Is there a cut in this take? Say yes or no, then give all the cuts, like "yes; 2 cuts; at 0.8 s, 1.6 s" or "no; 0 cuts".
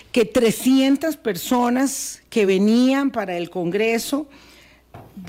no; 0 cuts